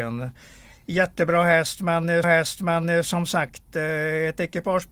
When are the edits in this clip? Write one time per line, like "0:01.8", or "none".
0:02.2